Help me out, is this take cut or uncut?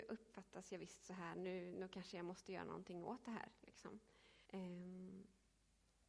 cut